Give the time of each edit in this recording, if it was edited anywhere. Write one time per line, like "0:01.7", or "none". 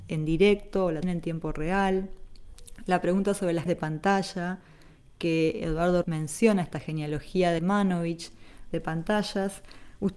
0:01.0
0:03.7
0:06.0
0:07.6

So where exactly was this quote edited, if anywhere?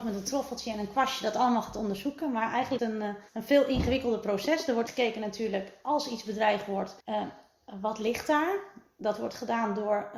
0:02.8
0:03.3
0:04.9
0:07.0

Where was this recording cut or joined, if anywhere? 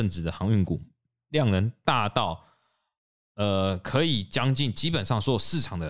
none

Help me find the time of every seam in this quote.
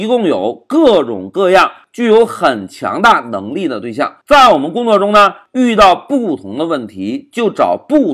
0:04.2

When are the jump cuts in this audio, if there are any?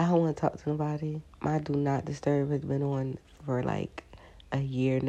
0:01.3

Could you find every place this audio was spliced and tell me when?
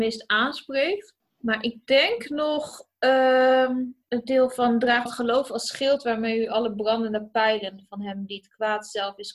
0:04.0
0:05.1

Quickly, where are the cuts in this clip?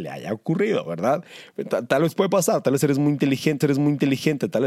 0:03.6

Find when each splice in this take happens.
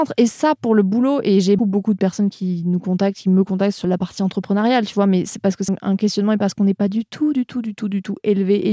0:01.6
0:03.8
0:05.7

